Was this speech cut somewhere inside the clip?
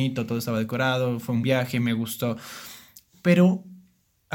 yes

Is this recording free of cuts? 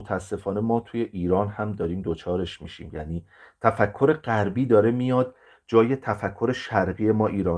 yes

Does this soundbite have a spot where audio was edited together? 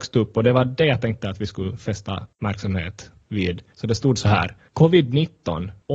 no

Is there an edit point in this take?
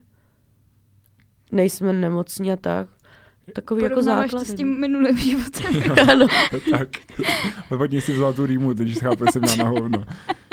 no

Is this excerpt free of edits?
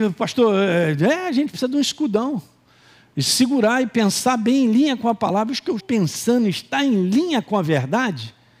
no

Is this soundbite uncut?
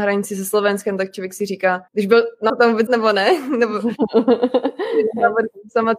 no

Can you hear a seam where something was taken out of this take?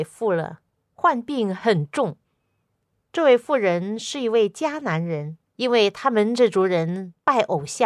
yes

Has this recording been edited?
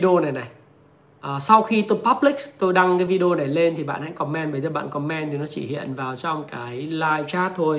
no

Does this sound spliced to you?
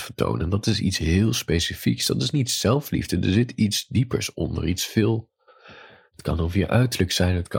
no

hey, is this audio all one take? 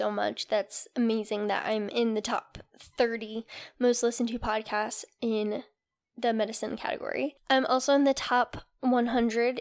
yes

